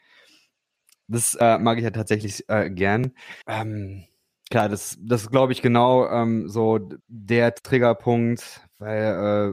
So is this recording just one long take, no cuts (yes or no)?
no